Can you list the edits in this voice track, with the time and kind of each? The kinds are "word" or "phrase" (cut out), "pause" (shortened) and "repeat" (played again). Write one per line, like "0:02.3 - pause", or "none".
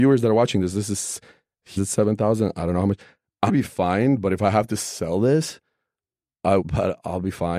0:01.8 - word
0:03.5 - word
0:06.6 - word